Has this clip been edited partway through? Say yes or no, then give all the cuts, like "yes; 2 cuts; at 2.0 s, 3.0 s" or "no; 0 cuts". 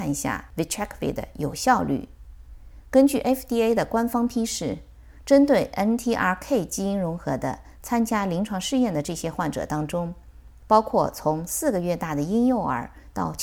no; 0 cuts